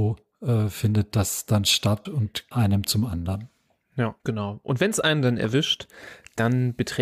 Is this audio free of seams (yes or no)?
no